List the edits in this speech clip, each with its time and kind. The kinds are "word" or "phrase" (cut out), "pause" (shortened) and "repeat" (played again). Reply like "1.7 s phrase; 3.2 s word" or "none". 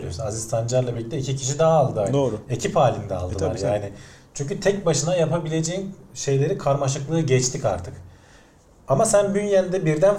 none